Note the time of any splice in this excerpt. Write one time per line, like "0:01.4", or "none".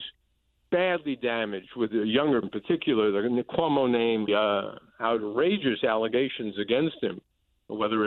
0:02.4
0:04.3